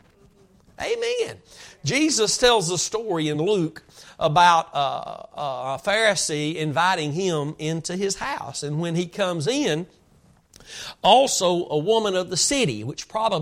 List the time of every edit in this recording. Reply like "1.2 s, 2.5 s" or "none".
none

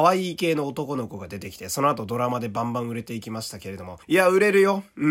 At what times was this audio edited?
4.0 s

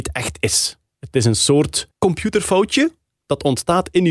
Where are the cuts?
1.9 s

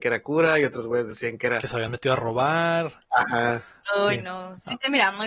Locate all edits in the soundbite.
none

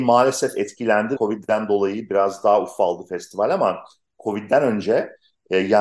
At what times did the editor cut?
1.2 s

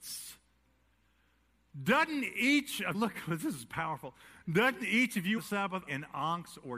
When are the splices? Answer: 2.9 s, 5.4 s, 5.9 s

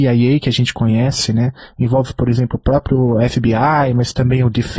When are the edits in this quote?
none

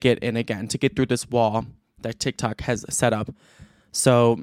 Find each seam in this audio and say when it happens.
none

